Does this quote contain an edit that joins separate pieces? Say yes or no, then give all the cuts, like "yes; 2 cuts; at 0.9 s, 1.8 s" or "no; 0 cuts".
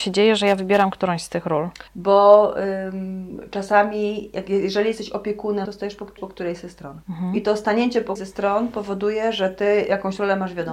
yes; 5 cuts; at 1.9 s, 5.7 s, 6.2 s, 7.0 s, 8.2 s